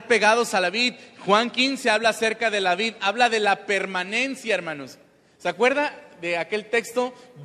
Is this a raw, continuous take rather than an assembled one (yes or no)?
yes